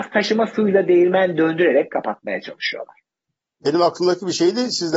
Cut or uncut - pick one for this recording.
uncut